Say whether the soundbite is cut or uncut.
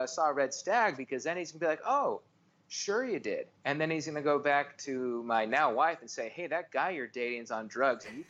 uncut